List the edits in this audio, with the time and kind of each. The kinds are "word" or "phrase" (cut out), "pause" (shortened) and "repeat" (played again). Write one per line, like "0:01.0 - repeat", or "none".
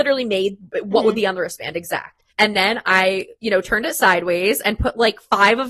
0:02.3 - pause
0:03.4 - pause